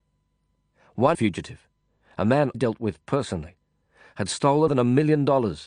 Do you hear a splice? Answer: yes; 3 cuts; at 1.1 s, 2.5 s, 4.7 s

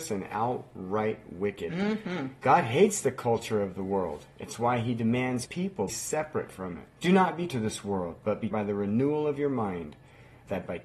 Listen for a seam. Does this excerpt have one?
yes; 5 cuts; at 5.4 s, 5.9 s, 6.9 s, 7.5 s, 8.5 s

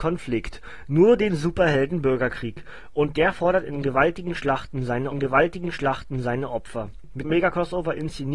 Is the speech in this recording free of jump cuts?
no; 2 cuts; at 5.1 s, 7.2 s

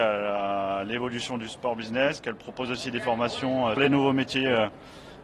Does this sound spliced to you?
yes; 1 cut; at 3.8 s

